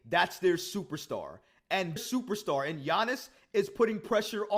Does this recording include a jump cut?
yes; 1 cut; at 2.0 s

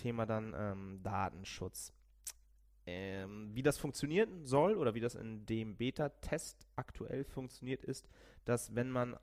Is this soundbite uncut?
yes; 0 cuts

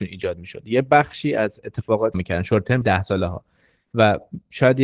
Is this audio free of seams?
no; 2 cuts; at 2.1 s, 2.8 s

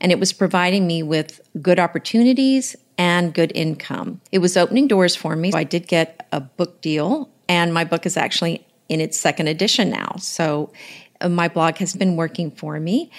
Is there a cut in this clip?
yes; 4 cuts; at 1.5 s, 4.3 s, 5.5 s, 11.9 s

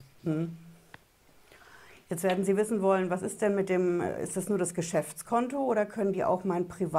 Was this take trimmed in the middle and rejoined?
no; 0 cuts

